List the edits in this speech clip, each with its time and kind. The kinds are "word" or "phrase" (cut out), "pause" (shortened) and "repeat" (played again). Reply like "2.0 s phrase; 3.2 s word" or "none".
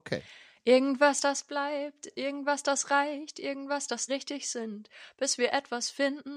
4.1 s phrase